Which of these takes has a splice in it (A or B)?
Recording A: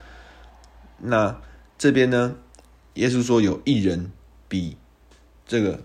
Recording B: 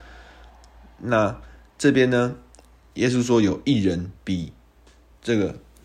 B